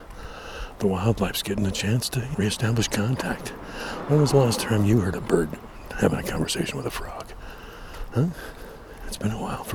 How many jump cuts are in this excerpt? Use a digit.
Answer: 1